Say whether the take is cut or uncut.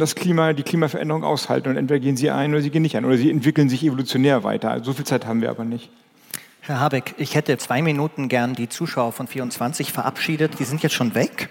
cut